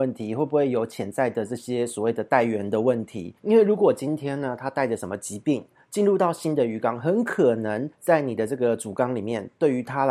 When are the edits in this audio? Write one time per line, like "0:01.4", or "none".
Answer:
0:03.4
0:07.9